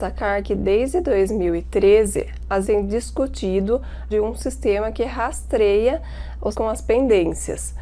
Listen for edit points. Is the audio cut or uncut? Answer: cut